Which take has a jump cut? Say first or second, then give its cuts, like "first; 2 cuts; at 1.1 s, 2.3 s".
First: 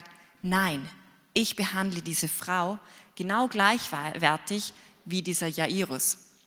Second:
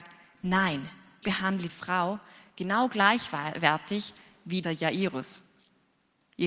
second; 3 cuts; at 1.2 s, 1.7 s, 4.6 s